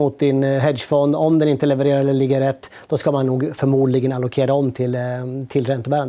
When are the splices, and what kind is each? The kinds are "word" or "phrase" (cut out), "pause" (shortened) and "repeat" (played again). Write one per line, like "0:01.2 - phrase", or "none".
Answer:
none